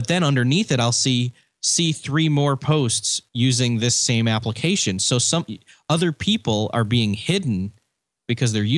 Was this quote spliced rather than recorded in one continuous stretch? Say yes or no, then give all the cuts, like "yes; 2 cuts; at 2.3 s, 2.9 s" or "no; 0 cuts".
yes; 1 cut; at 3.3 s